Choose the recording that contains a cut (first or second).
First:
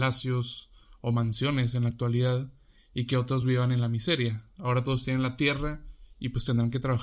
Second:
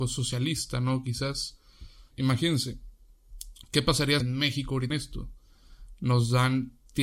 second